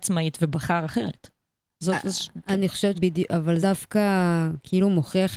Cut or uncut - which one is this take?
cut